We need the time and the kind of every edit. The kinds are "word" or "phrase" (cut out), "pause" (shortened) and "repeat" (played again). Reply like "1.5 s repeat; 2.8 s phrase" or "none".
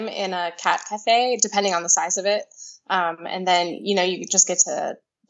none

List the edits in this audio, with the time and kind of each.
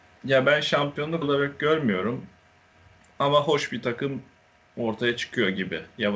1.2 s word

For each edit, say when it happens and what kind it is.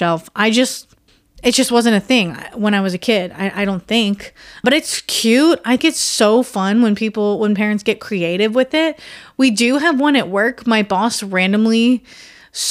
1.1 s pause; 4.6 s word; 5.8 s word

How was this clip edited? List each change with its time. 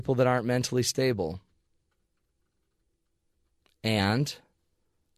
none

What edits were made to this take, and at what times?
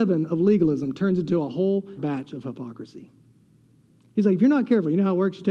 2.0 s word

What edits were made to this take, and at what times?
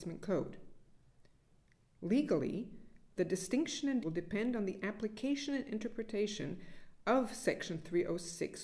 4.0 s word

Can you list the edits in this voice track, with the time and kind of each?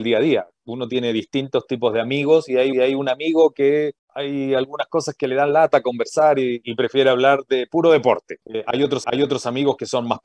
2.7 s repeat; 4.0 s pause; 6.6 s word; 8.4 s pause; 9.0 s repeat

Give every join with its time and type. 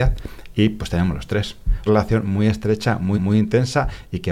1.9 s phrase; 3.1 s repeat

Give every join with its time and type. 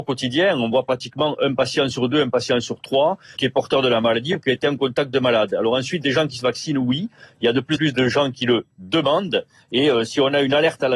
3.4 s word; 7.8 s word

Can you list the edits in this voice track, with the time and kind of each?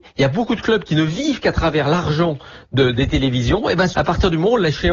3.9 s phrase

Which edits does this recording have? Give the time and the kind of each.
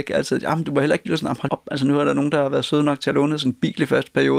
1.1 s phrase; 1.5 s word

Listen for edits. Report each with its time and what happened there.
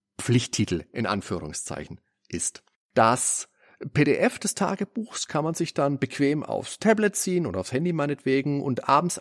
none

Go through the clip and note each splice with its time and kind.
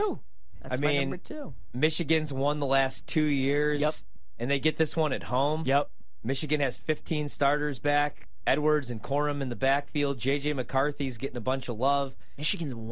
none

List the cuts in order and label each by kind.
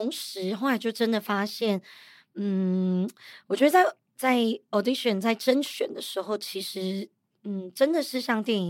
none

